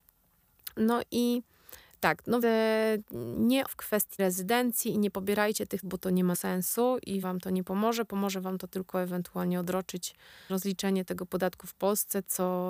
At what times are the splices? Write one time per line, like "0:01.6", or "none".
0:02.4
0:03.7
0:04.2
0:05.8
0:06.3
0:07.2
0:10.5